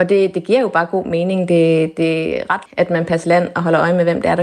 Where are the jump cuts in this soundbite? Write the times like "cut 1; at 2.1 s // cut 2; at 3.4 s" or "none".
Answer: cut 1; at 2.7 s // cut 2; at 3.2 s

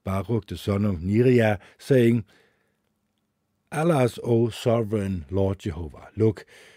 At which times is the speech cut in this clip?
none

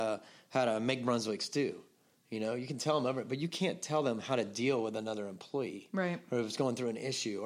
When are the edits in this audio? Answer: none

